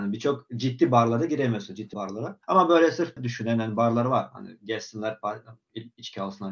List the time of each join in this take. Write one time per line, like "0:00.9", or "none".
0:01.9
0:02.4
0:03.2

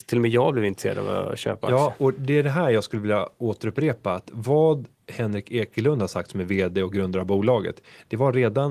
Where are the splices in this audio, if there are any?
none

